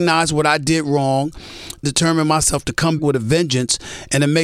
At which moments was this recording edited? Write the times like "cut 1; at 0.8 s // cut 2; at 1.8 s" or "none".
cut 1; at 1.8 s // cut 2; at 3.0 s